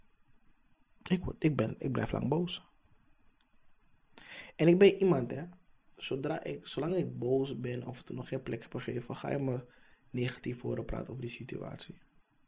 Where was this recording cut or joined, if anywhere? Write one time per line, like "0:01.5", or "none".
none